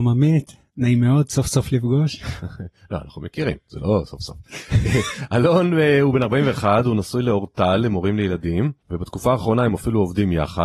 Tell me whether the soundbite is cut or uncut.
uncut